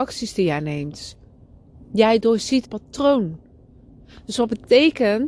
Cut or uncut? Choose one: cut